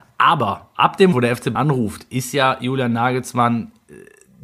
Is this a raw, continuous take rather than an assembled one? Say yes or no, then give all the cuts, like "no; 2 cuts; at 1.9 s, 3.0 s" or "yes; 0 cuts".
no; 2 cuts; at 1.1 s, 1.6 s